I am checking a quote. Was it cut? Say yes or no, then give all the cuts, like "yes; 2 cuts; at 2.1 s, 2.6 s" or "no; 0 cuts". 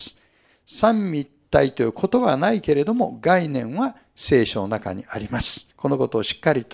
yes; 1 cut; at 5.7 s